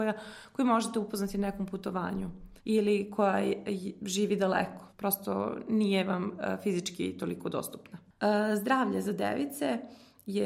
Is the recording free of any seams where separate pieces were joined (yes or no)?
no